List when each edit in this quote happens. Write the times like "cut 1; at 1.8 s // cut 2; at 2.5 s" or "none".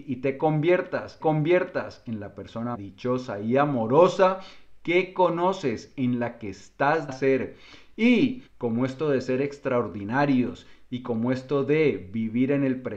cut 1; at 1.2 s // cut 2; at 2.7 s // cut 3; at 7.1 s // cut 4; at 8.5 s